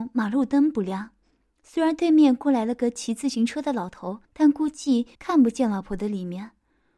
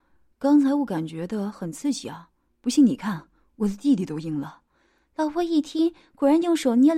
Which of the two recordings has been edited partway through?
first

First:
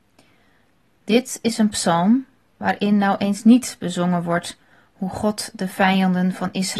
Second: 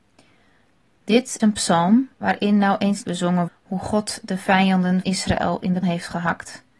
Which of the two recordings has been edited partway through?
second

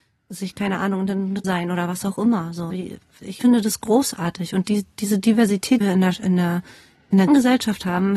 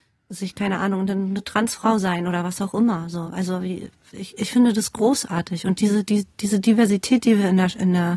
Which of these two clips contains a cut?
first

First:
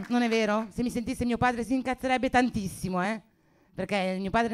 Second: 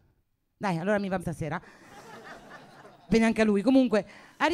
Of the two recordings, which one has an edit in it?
second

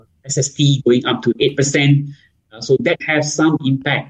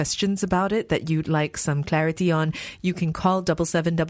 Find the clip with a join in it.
first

